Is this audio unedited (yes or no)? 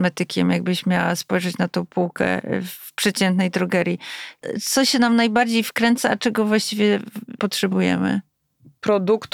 no